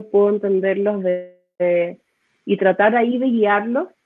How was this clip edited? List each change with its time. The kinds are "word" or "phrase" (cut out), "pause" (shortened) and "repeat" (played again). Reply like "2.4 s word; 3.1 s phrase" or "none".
none